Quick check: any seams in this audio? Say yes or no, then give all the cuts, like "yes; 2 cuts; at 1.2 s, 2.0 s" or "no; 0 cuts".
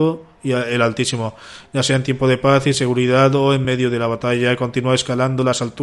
no; 0 cuts